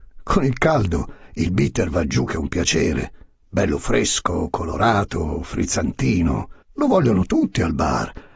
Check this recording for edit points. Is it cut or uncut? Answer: cut